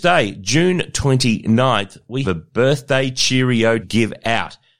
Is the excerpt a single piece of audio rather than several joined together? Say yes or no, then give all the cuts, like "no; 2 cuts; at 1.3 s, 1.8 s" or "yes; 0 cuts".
no; 2 cuts; at 2.2 s, 3.8 s